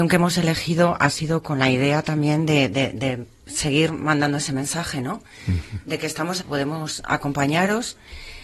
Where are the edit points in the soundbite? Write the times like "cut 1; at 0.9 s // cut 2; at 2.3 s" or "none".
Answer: cut 1; at 6.4 s